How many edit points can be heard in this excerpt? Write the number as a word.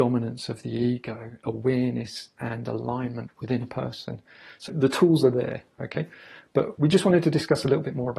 three